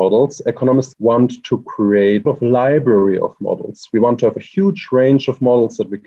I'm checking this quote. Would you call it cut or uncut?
cut